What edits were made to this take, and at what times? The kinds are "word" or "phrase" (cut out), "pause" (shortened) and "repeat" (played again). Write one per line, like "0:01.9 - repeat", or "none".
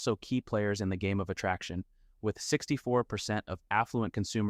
none